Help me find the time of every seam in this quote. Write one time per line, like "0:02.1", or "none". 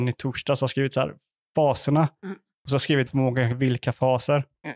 0:03.1
0:03.5